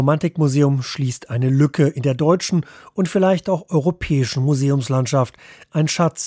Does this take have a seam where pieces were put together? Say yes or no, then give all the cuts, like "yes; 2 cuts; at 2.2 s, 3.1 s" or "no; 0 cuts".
no; 0 cuts